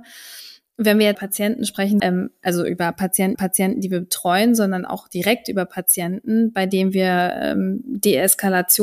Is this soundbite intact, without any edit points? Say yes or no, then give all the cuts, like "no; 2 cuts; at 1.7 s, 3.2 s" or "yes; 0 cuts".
no; 3 cuts; at 1.1 s, 2.0 s, 3.3 s